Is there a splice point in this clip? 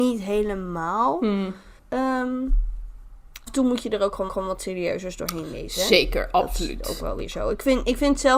yes; 3 cuts; at 1.8 s, 3.5 s, 4.3 s

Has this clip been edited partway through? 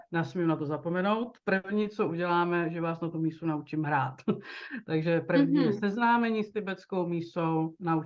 no; 0 cuts

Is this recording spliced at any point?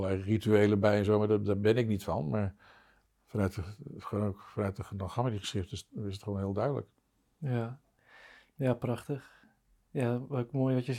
no; 0 cuts

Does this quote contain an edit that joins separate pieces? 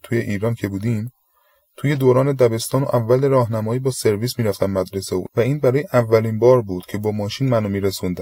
no; 0 cuts

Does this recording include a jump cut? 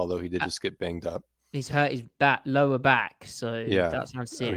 no; 0 cuts

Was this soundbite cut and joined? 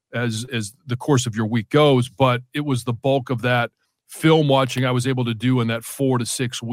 yes; 1 cut; at 3.8 s

